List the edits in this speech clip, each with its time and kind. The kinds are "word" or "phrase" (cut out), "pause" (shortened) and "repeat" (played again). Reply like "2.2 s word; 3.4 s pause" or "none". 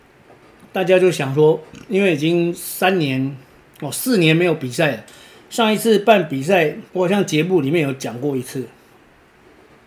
6.9 s pause